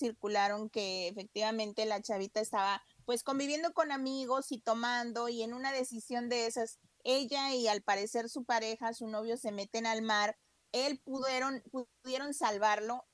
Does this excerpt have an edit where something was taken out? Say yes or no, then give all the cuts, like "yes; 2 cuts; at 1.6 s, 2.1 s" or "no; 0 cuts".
no; 0 cuts